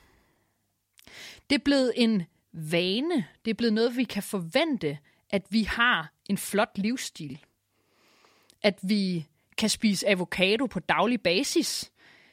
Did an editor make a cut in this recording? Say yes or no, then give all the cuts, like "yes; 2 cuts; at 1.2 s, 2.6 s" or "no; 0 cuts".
no; 0 cuts